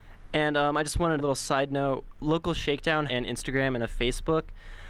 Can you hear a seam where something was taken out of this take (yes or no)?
yes